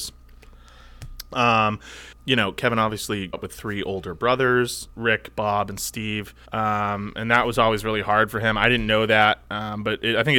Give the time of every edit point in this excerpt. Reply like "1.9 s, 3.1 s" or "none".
2.2 s, 3.3 s, 6.4 s